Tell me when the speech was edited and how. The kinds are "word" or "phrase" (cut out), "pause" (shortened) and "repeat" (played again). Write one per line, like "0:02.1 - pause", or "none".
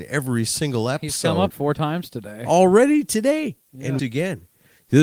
0:01.5 - word
0:04.0 - word